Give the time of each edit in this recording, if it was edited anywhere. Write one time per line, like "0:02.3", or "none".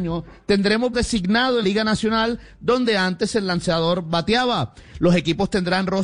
0:00.9
0:01.6